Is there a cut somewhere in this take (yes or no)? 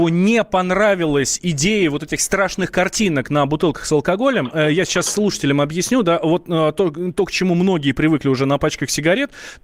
no